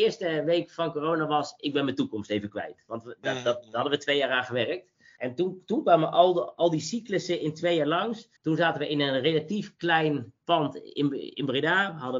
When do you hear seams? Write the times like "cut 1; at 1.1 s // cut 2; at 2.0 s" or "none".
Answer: cut 1; at 8.4 s